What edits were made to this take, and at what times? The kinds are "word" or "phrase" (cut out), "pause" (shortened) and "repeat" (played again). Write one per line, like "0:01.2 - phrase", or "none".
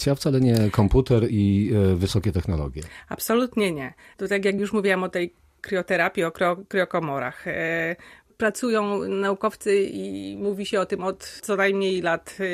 none